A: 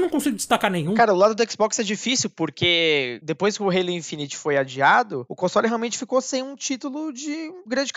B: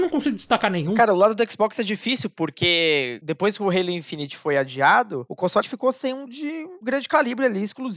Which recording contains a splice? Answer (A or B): B